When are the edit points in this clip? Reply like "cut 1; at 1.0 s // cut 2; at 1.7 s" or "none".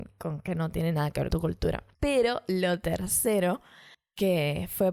cut 1; at 1.3 s